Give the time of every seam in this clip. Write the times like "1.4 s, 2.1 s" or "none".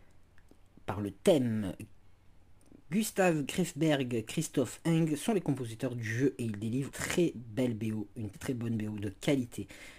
6.9 s, 8.3 s